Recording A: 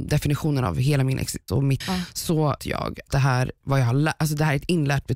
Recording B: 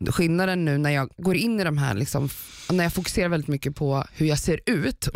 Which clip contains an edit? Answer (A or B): A